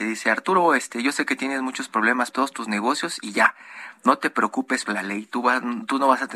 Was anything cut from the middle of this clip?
yes; 2 cuts; at 2.3 s, 4.9 s

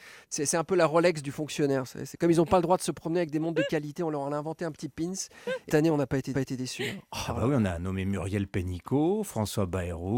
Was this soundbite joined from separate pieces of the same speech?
yes; 3 cuts; at 5.7 s, 6.3 s, 7.7 s

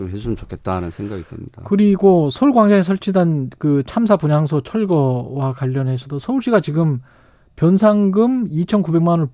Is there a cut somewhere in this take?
no; 0 cuts

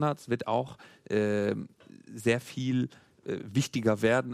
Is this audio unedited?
yes; 0 cuts

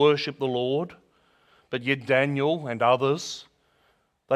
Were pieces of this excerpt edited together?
no; 0 cuts

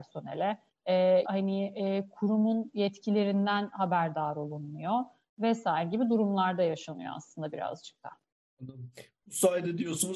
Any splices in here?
yes; 1 cut; at 1.2 s

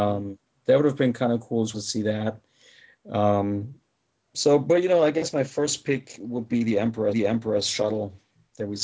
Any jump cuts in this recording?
yes; 2 cuts; at 1.7 s, 7.1 s

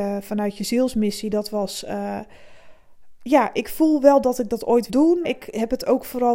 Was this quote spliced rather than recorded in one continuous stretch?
yes; 2 cuts; at 4.9 s, 5.2 s

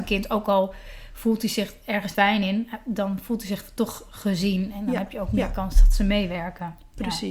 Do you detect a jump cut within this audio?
yes; 1 cut; at 2.1 s

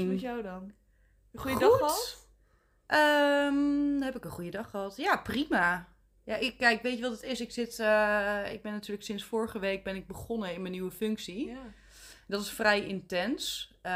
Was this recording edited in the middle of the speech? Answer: no; 0 cuts

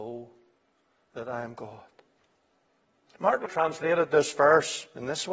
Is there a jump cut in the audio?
yes; 1 cut; at 3.5 s

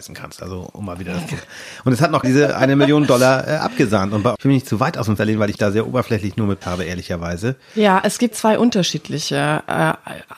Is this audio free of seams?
no; 6 cuts; at 2.2 s, 4.4 s, 5.2 s, 5.6 s, 6.6 s, 8.3 s

